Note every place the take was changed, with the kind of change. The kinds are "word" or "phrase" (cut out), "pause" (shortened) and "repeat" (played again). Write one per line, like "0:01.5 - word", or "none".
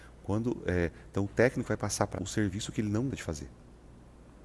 0:02.2 - word
0:03.1 - word